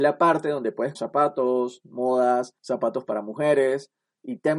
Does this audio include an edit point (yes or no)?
yes